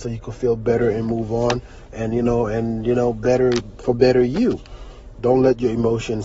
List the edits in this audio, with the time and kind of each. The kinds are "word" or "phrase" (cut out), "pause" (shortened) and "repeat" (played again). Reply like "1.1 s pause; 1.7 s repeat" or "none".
none